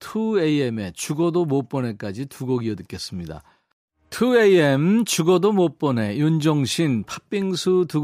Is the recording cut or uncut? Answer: uncut